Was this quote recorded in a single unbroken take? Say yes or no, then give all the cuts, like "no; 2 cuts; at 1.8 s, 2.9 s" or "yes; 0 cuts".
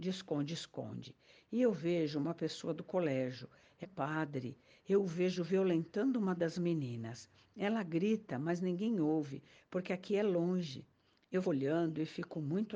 no; 2 cuts; at 3.8 s, 11.4 s